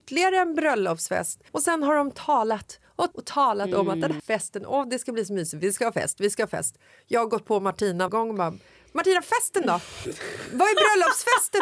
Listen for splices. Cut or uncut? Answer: cut